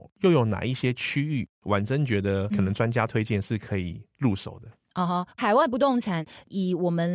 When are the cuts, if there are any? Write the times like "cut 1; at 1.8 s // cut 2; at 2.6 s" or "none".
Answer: cut 1; at 5.3 s

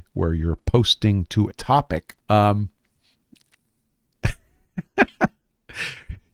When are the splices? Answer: cut 1; at 1.5 s // cut 2; at 2.2 s

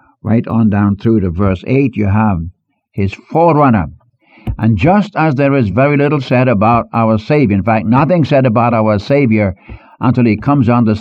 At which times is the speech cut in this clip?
none

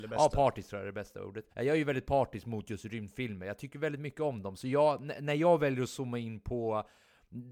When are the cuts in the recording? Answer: cut 1; at 1.5 s

